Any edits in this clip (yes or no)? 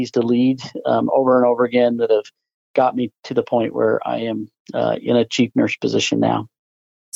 no